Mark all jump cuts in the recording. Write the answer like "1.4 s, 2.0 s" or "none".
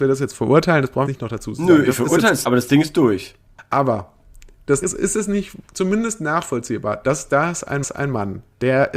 1.1 s, 2.4 s, 4.8 s, 7.8 s